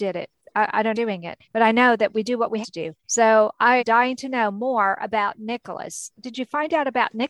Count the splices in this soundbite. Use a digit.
5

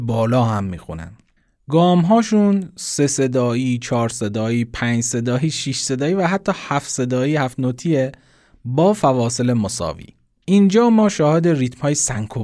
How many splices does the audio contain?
0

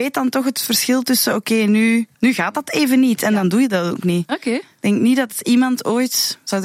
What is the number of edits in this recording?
1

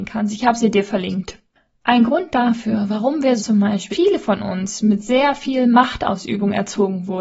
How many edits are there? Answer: 2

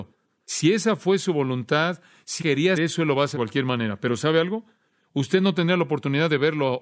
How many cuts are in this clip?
3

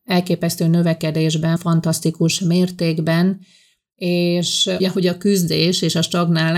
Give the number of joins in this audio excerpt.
2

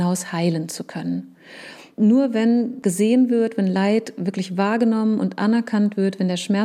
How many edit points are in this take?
0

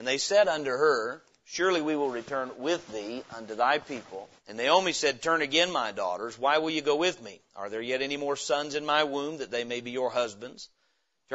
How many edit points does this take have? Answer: 1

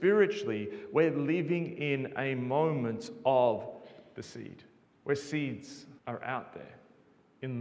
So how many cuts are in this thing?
2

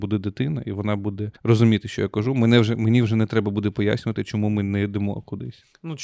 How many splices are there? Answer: 1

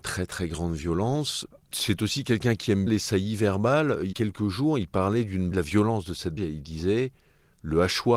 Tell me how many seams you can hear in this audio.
4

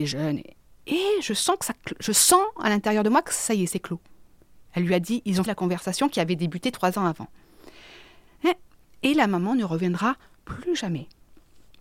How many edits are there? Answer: 1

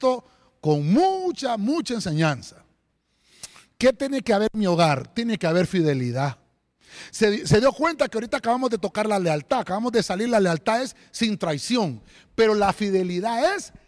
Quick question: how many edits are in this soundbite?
0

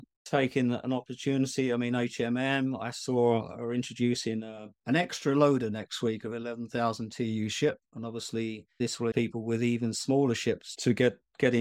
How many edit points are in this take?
2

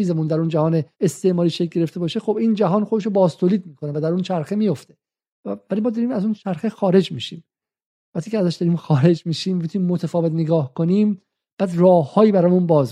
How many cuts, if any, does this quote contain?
1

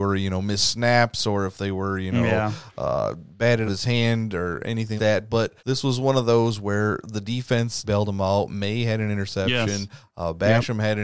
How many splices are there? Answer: 4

